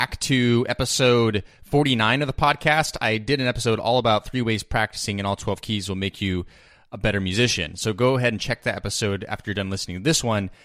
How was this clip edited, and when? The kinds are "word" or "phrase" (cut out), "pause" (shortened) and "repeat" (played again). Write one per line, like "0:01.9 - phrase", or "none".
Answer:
none